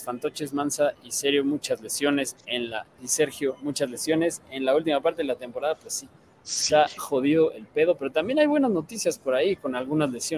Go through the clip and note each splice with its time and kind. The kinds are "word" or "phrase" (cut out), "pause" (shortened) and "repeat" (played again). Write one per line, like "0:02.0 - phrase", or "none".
0:07.0 - word